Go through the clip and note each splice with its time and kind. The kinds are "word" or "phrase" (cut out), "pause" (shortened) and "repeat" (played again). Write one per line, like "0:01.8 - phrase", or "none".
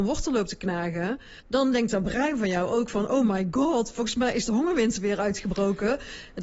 0:01.4 - pause